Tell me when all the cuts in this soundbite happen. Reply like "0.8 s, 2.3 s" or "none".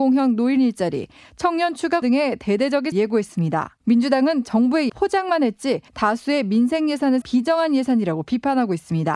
2.0 s, 2.9 s, 3.8 s, 4.9 s, 5.9 s, 7.2 s